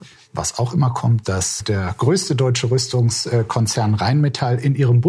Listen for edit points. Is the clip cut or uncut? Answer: cut